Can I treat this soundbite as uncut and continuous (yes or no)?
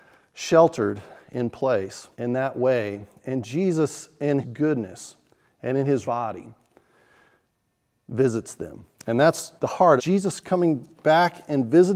no